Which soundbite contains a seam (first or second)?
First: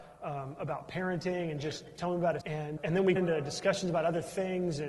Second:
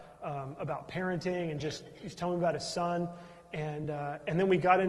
first